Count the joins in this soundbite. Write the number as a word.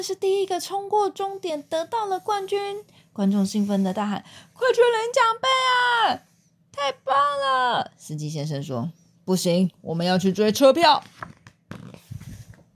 zero